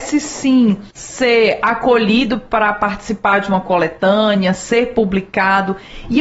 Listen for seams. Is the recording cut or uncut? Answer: cut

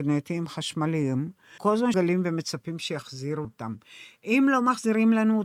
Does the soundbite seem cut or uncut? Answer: cut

